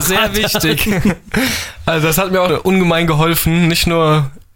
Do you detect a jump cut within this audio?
yes; 1 cut; at 2.5 s

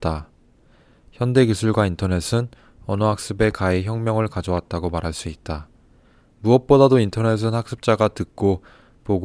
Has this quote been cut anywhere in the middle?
no; 0 cuts

